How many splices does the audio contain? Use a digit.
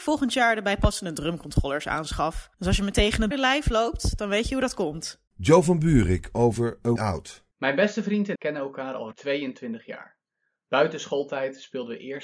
7